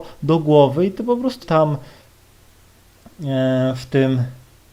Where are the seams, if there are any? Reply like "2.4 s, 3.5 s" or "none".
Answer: 1.4 s